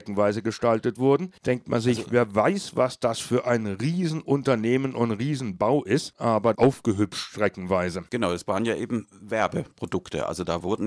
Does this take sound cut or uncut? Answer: cut